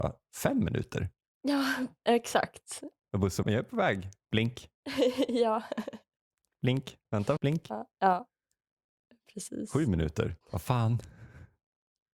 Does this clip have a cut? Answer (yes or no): yes